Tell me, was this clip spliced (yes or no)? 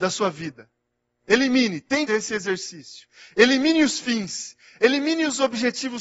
yes